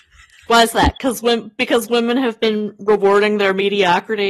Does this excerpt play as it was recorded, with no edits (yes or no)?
yes